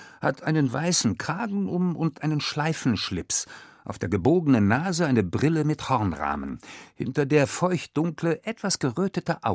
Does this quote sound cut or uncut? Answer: uncut